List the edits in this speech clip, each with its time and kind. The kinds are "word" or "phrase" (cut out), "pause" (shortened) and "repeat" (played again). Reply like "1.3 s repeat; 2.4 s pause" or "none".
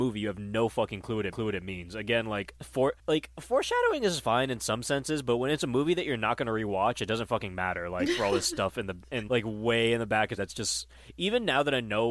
1.3 s repeat; 3.0 s pause; 9.3 s word; 10.4 s phrase